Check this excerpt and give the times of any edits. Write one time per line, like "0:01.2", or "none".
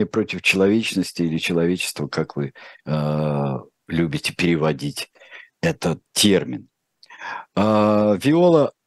0:06.1